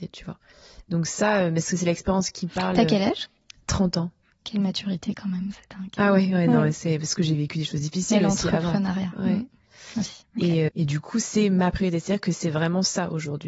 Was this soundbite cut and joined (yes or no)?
yes